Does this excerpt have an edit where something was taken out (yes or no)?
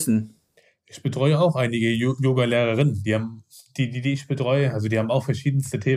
no